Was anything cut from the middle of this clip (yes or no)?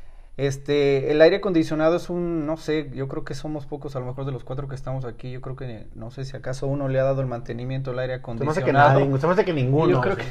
no